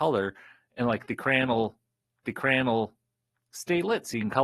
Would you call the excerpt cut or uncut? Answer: cut